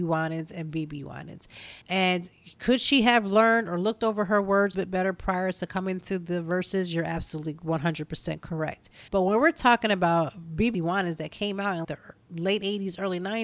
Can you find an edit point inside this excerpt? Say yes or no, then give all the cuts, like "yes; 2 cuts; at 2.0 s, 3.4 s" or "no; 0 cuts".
yes; 5 cuts; at 1.8 s, 4.7 s, 9.1 s, 10.7 s, 11.8 s